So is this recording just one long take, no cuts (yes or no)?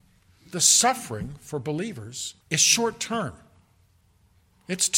no